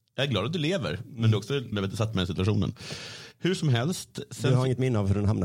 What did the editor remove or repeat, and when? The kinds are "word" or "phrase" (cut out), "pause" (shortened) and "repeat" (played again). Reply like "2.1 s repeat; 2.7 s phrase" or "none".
1.7 s word